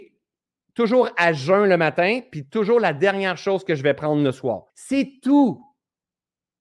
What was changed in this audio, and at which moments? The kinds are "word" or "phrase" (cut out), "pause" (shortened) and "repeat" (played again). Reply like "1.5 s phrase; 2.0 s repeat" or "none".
4.7 s pause